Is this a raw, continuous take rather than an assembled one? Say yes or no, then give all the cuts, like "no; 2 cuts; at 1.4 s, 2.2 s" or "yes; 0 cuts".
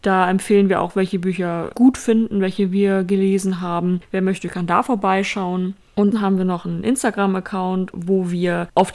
no; 2 cuts; at 1.7 s, 6.1 s